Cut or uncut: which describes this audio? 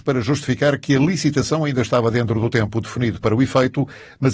uncut